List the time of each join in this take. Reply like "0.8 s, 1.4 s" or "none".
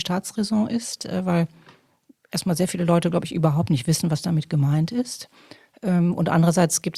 none